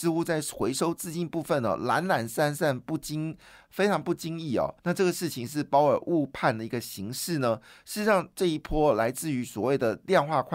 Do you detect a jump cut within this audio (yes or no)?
yes